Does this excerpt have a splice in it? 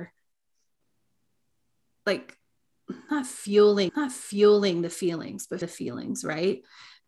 yes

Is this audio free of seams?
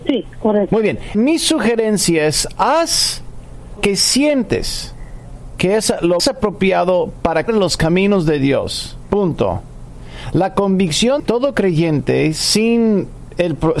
no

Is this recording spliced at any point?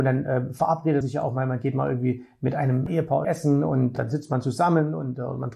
yes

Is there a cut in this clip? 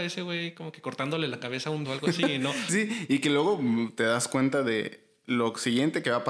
yes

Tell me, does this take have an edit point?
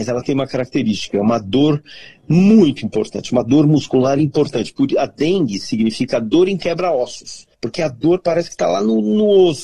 yes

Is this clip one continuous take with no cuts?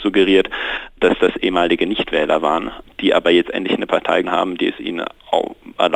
no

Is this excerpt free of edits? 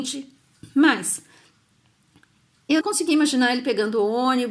no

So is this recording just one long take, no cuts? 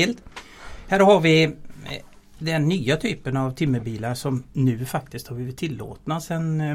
yes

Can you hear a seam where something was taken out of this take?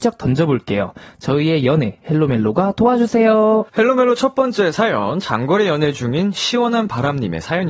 yes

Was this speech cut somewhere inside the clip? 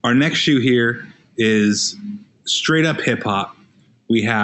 no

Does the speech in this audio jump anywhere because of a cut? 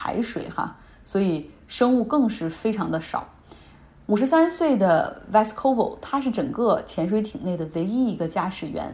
no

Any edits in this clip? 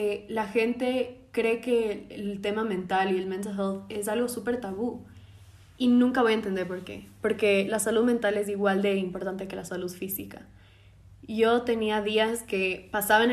no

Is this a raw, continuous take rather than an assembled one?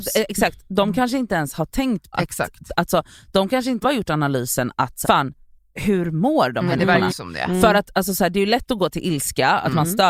no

